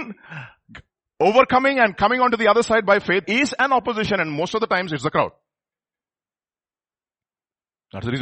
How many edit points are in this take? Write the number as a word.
one